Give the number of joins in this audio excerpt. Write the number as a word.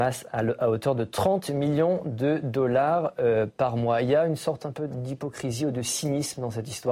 zero